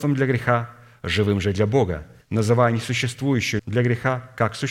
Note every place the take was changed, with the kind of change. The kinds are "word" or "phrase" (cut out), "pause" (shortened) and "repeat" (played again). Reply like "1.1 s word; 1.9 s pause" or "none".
2.2 s pause; 3.6 s word